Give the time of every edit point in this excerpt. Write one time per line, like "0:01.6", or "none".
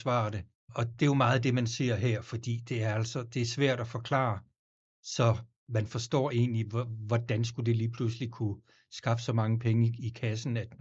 none